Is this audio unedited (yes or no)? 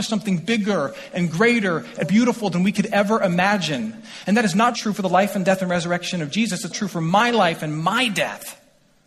no